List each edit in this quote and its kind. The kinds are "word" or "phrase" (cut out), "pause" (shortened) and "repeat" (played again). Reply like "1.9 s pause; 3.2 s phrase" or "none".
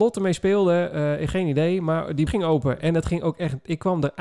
2.3 s word